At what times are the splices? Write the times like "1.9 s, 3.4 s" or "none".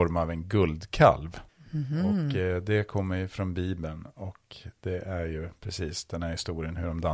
1.5 s